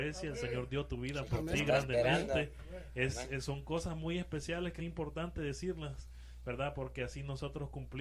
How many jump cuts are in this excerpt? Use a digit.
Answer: 1